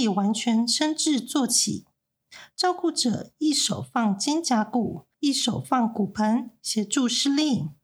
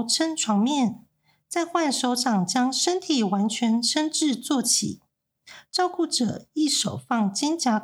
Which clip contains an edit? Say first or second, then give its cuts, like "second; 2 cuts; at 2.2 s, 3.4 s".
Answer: first; 1 cut; at 5.1 s